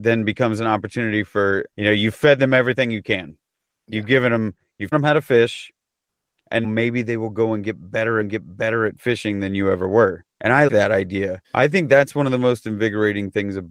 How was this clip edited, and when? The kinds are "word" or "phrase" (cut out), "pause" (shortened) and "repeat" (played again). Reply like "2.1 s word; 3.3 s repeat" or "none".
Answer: 1.7 s pause; 4.9 s word; 6.6 s word; 8.2 s repeat; 10.3 s pause; 10.7 s word; 11.4 s pause